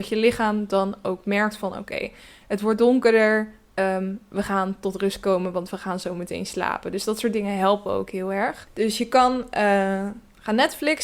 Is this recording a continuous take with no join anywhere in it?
yes; 0 cuts

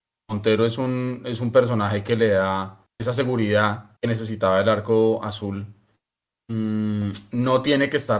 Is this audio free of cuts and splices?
no; 2 cuts; at 2.9 s, 4.0 s

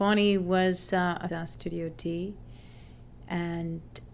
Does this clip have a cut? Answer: yes; 1 cut; at 1.3 s

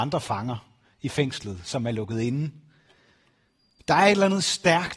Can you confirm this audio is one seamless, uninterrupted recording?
yes; 0 cuts

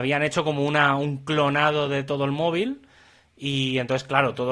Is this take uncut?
yes; 0 cuts

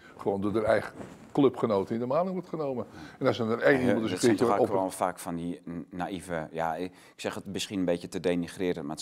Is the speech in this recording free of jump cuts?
yes; 0 cuts

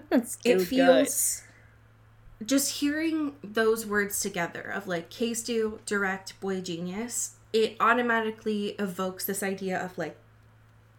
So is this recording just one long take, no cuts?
yes; 0 cuts

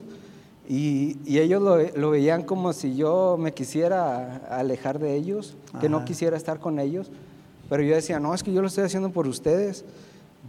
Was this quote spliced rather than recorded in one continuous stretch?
no; 0 cuts

